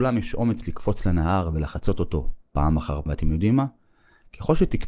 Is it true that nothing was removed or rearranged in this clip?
no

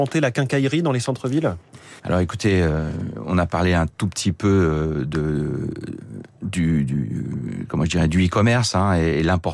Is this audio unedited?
no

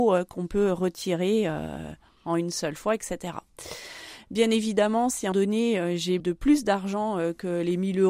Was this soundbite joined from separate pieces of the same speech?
yes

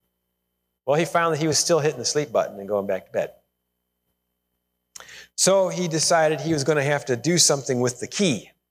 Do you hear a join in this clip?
no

